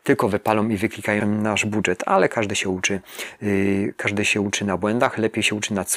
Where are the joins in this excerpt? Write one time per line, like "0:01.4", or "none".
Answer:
0:01.2